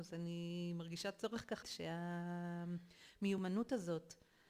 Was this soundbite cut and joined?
yes; 1 cut; at 1.6 s

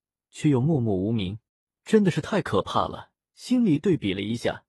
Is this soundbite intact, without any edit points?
no; 2 cuts; at 1.5 s, 3.2 s

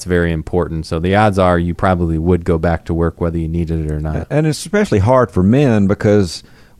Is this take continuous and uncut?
yes; 0 cuts

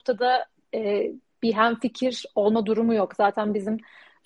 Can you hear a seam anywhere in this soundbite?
no; 0 cuts

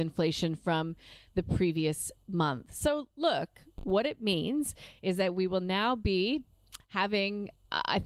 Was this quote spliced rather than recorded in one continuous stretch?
no; 0 cuts

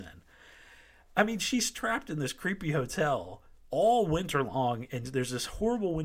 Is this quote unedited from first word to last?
yes; 0 cuts

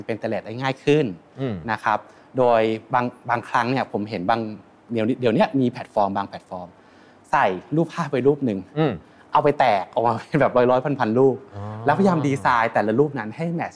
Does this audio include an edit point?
no; 0 cuts

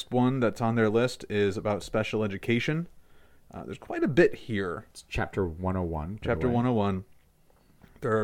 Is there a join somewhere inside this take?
no; 0 cuts

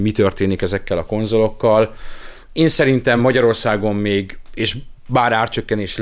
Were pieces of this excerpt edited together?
no; 0 cuts

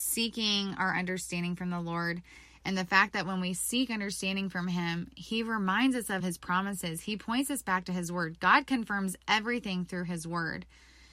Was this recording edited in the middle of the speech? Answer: no; 0 cuts

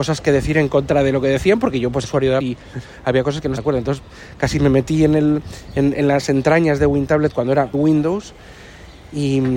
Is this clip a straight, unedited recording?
no; 5 cuts; at 2.0 s, 2.4 s, 3.6 s, 5.9 s, 7.7 s

